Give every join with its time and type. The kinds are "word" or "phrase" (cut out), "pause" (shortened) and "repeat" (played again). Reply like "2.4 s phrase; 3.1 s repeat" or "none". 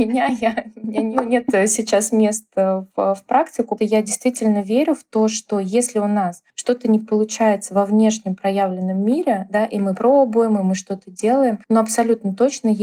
3.8 s word; 6.5 s pause; 11.6 s pause